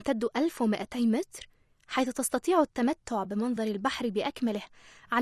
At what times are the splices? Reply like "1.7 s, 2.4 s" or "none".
none